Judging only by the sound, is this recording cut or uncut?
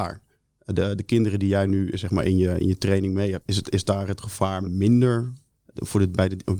cut